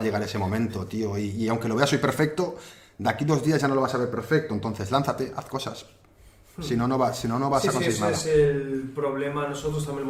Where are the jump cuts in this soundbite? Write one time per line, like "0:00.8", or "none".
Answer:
none